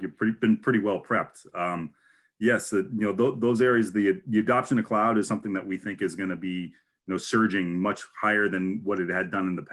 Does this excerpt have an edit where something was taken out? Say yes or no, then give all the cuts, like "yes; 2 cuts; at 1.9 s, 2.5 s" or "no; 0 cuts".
no; 0 cuts